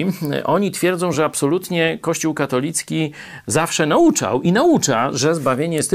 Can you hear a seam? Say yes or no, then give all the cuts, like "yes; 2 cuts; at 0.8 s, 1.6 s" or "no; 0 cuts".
no; 0 cuts